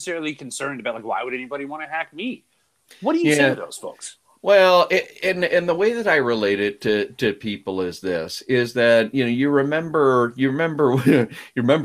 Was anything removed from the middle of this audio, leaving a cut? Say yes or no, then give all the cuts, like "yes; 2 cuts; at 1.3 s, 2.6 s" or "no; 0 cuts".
no; 0 cuts